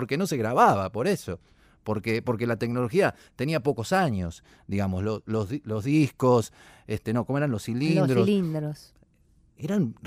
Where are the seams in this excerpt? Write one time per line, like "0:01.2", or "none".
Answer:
none